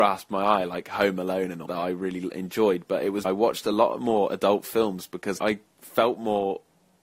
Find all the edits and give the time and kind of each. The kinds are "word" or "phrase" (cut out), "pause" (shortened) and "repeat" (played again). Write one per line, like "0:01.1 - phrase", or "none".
0:01.7 - word
0:03.2 - word
0:05.4 - word